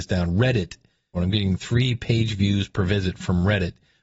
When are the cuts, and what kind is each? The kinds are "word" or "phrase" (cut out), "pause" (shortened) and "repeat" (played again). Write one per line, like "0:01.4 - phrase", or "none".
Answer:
0:01.1 - phrase